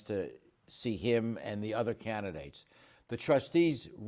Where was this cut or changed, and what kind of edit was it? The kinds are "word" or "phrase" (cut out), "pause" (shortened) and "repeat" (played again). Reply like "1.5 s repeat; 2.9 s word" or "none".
none